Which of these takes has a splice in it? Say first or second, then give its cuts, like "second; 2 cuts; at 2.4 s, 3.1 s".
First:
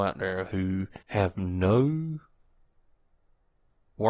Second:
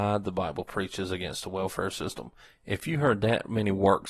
first; 1 cut; at 1.0 s